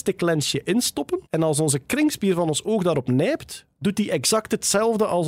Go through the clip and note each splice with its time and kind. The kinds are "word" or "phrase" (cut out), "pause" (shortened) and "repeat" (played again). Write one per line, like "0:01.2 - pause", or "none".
0:01.3 - pause